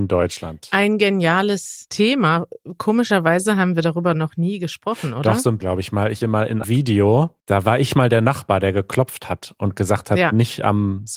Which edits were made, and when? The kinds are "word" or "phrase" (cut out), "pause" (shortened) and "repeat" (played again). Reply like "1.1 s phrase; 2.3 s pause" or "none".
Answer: 5.6 s word; 6.2 s phrase; 6.6 s word; 7.4 s pause